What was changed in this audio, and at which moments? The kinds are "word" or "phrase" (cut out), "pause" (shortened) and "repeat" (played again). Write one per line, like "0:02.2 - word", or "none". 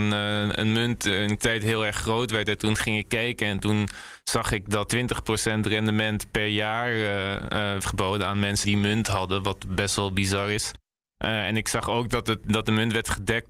0:01.4 - word
0:04.9 - word
0:07.8 - word
0:08.6 - word